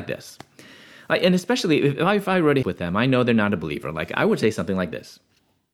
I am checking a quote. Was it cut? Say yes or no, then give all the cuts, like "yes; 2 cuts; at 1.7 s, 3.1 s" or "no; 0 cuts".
yes; 1 cut; at 2.6 s